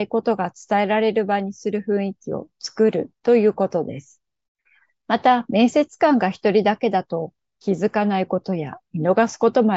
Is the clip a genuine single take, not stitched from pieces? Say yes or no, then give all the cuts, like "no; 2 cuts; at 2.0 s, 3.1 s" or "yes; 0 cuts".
no; 1 cut; at 4.5 s